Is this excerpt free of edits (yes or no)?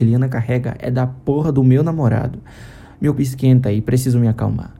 no